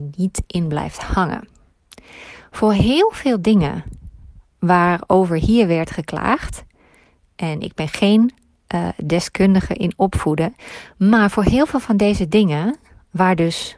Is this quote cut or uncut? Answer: uncut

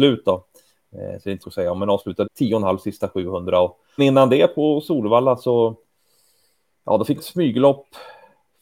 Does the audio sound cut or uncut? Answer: cut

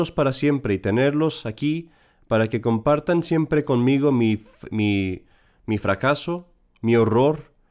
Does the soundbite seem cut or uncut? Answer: uncut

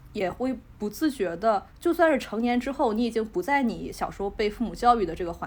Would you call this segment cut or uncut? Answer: cut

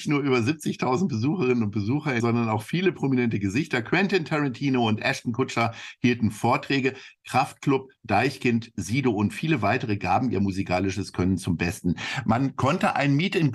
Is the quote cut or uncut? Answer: cut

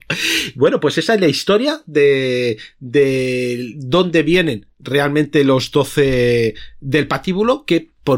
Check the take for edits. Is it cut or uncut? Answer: uncut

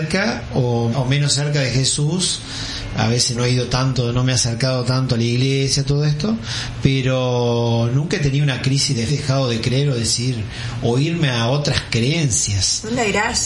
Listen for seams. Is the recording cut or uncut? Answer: cut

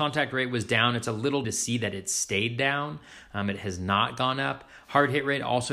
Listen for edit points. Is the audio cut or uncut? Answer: cut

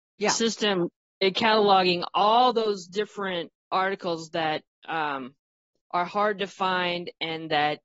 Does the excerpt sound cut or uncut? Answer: uncut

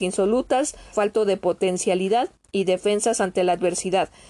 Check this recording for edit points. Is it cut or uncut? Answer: cut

